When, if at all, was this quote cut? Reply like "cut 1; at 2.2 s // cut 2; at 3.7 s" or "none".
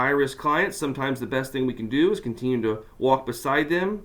none